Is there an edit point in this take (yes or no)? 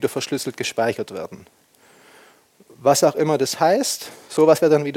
no